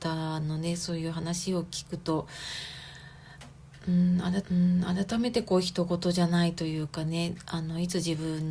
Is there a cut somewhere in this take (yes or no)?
yes